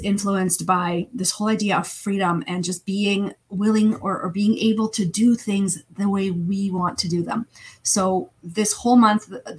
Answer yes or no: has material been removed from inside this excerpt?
no